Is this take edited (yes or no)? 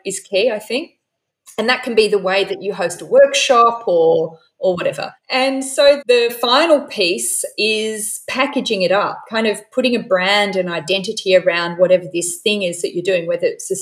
yes